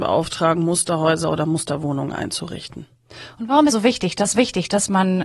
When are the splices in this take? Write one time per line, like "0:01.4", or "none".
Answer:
0:03.7
0:04.3